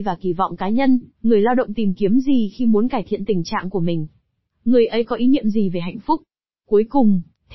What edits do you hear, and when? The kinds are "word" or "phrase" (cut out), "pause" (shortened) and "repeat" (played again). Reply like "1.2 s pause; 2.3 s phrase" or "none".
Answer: 1.1 s pause